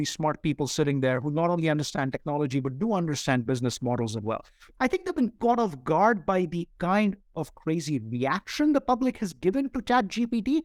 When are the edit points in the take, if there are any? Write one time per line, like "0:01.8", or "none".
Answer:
none